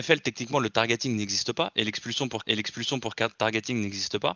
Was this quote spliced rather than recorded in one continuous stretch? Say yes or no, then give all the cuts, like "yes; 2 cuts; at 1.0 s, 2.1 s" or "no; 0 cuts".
yes; 1 cut; at 2.4 s